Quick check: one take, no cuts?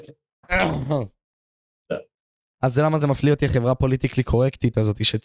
yes; 0 cuts

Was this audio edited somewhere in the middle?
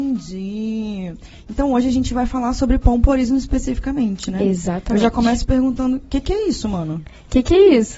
no; 0 cuts

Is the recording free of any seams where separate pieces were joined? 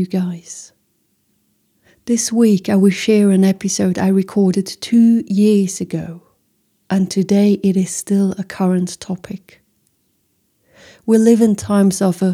yes; 0 cuts

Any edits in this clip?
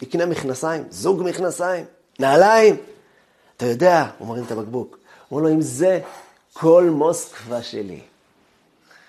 no; 0 cuts

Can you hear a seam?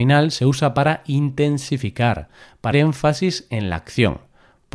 yes; 1 cut; at 2.7 s

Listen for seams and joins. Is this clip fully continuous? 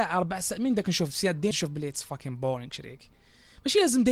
no; 1 cut; at 1.5 s

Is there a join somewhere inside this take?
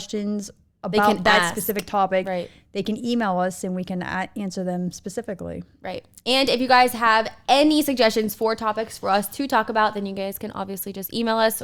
no; 0 cuts

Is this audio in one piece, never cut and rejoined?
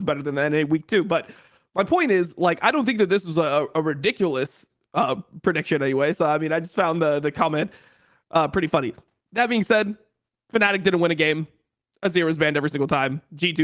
yes; 0 cuts

